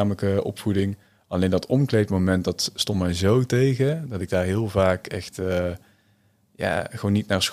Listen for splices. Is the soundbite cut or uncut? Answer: uncut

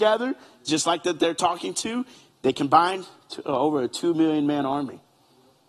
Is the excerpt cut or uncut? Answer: uncut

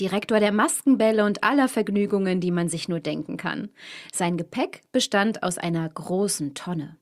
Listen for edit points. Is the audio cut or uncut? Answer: uncut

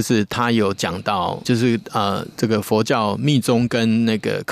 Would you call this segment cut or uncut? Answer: cut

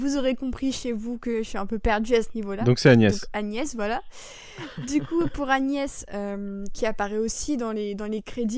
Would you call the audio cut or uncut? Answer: uncut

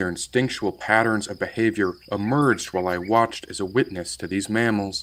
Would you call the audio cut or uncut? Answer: cut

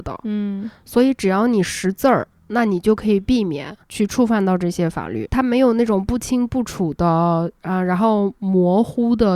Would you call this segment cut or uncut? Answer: cut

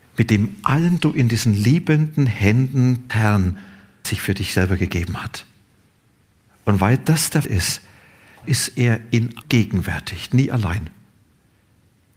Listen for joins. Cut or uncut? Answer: cut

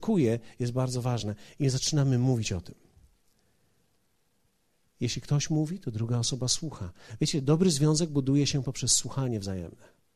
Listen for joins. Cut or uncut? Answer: uncut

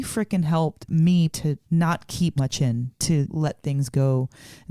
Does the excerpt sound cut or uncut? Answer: cut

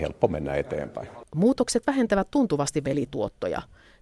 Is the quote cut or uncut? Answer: cut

